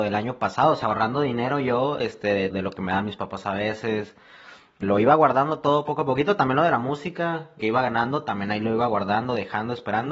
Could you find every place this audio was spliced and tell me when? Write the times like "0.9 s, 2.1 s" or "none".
2.5 s, 4.8 s, 7.6 s